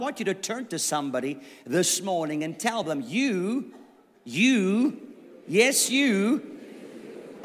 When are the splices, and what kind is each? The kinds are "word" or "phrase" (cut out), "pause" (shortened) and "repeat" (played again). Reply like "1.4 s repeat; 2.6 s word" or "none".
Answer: none

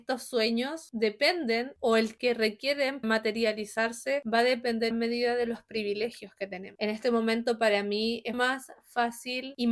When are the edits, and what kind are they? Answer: 2.2 s word; 3.0 s word; 4.9 s phrase; 8.3 s word

